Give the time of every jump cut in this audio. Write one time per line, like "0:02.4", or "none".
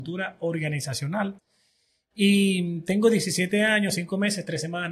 none